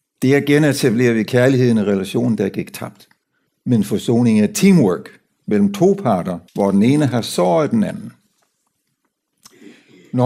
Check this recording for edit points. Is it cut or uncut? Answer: cut